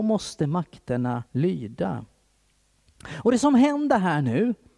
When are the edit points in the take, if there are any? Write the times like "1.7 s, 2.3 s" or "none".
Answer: 1.3 s